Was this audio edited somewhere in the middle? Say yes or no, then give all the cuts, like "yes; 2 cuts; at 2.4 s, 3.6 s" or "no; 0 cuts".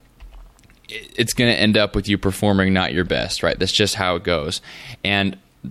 no; 0 cuts